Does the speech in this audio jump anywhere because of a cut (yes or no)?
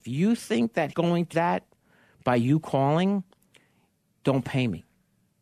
yes